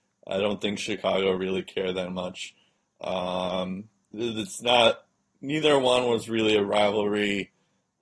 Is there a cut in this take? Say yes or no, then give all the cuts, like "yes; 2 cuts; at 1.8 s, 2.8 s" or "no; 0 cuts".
no; 0 cuts